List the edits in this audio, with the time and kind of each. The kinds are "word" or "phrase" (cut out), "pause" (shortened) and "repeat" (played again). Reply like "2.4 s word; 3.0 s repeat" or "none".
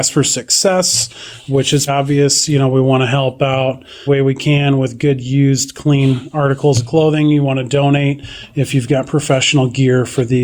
1.9 s word; 4.1 s word